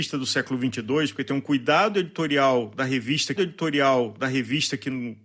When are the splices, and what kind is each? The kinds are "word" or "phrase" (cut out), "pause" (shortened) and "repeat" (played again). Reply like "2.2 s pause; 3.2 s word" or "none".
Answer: 3.4 s repeat